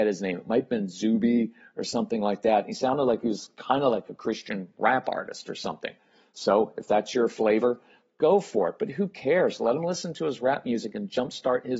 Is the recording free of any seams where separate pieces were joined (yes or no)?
yes